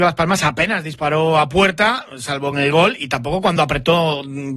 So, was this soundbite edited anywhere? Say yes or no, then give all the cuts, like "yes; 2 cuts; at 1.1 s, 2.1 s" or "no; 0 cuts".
no; 0 cuts